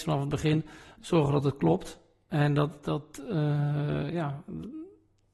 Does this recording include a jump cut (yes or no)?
no